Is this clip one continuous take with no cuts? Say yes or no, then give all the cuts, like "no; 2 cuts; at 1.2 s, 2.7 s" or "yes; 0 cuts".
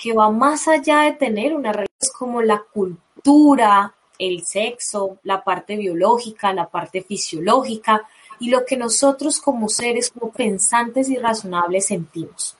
no; 1 cut; at 10.3 s